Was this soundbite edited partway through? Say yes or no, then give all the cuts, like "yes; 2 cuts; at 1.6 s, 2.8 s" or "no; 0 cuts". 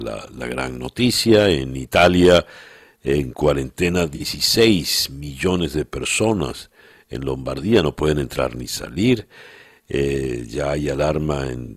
no; 0 cuts